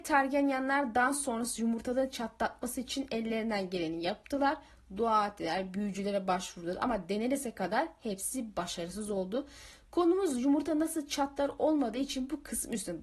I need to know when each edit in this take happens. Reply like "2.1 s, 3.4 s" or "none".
none